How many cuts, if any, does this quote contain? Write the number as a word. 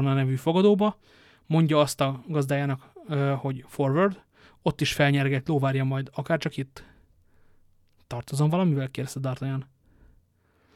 zero